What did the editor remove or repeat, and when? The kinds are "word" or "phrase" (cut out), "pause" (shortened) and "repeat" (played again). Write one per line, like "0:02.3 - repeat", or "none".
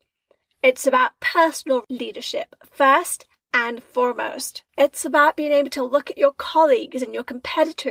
0:04.7 - pause

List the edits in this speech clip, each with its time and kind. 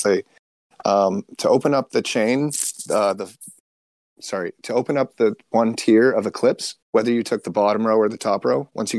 0:06.8 - pause

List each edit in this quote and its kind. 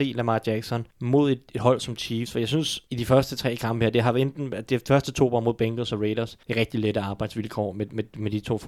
0:00.9 - pause
0:02.9 - pause
0:06.4 - pause

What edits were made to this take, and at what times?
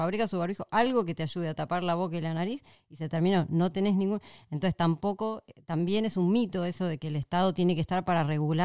none

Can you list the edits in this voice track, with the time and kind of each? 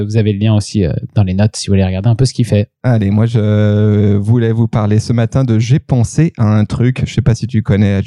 none

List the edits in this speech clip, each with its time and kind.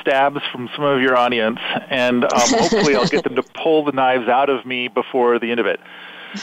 none

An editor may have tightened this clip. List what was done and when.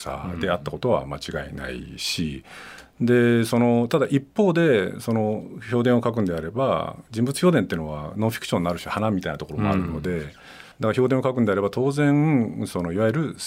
0:10.7 - pause

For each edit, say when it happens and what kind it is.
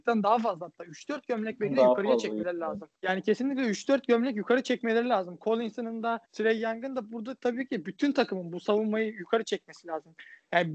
0:02.9 - pause
0:06.2 - pause

